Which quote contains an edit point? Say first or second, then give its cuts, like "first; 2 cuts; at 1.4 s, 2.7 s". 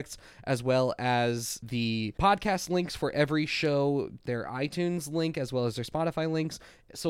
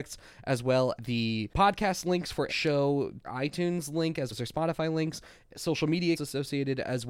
second; 5 cuts; at 1.0 s, 2.5 s, 3.2 s, 4.3 s, 6.1 s